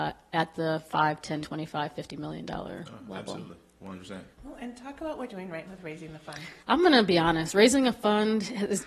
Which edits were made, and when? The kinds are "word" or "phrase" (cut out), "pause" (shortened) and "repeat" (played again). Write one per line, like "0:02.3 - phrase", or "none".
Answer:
0:01.4 - word
0:04.3 - pause
0:05.3 - word
0:05.7 - word
0:06.6 - pause